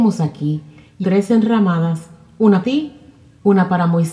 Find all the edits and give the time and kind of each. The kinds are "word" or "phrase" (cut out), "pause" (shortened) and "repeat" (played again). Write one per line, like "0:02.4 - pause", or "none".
0:01.0 - word
0:02.6 - word